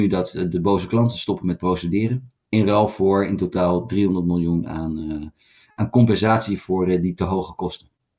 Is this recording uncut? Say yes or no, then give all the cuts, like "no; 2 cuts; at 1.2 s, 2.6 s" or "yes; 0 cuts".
yes; 0 cuts